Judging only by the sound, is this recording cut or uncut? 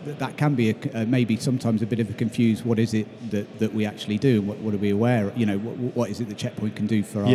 uncut